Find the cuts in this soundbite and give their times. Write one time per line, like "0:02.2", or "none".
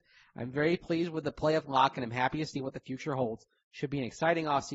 none